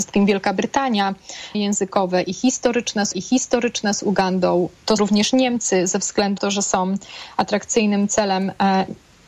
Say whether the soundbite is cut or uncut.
cut